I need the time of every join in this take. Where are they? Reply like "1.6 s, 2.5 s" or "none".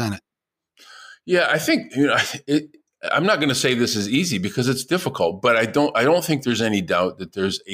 none